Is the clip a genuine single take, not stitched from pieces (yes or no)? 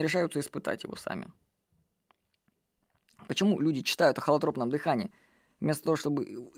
yes